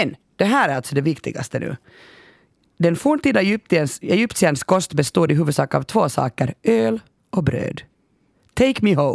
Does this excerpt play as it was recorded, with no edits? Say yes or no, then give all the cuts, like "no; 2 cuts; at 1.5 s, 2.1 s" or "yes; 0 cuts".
yes; 0 cuts